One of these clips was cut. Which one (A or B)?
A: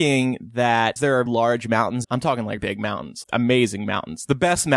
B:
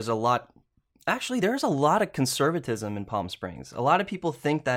A